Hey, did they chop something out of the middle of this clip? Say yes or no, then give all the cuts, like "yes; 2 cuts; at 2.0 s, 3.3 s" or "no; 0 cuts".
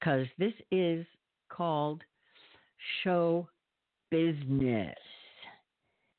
no; 0 cuts